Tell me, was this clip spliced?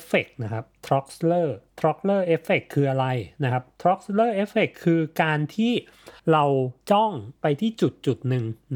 yes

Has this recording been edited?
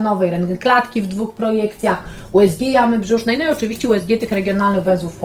no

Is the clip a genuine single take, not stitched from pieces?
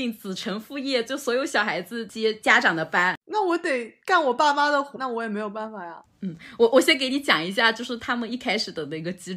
no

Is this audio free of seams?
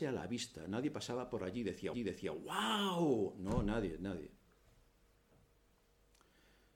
no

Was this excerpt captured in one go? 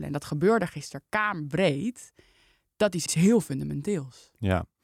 no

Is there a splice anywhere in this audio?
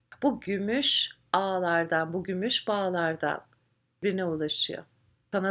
no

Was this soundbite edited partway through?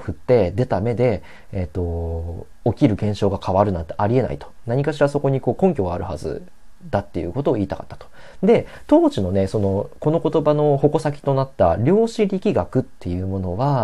no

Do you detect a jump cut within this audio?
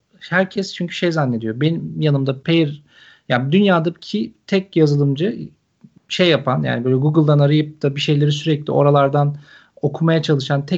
no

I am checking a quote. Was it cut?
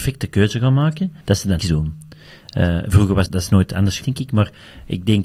yes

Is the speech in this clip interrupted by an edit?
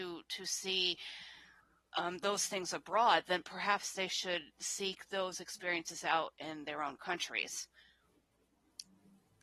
no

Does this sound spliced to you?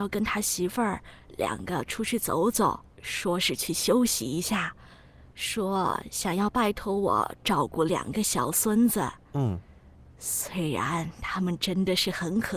yes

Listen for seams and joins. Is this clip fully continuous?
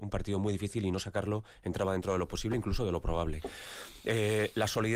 yes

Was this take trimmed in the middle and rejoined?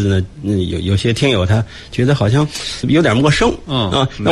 yes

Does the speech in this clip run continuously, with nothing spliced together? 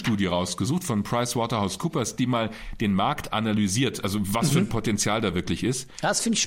yes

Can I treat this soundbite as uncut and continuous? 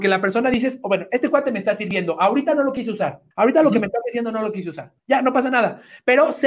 no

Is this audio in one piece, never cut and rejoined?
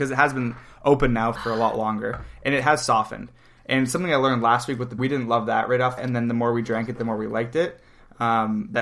no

